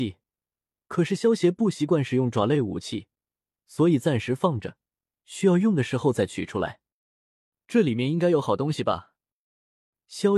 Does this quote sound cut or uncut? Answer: uncut